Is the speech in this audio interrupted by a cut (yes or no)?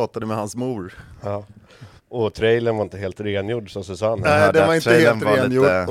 yes